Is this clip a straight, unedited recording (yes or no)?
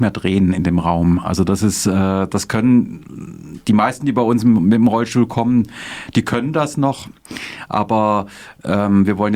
yes